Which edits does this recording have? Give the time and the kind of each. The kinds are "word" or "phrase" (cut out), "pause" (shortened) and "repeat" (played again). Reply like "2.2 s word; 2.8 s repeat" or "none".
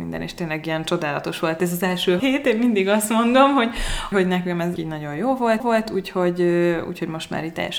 2.2 s word; 4.1 s word; 4.8 s phrase; 5.6 s repeat